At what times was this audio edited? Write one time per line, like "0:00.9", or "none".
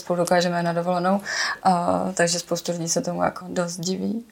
0:03.4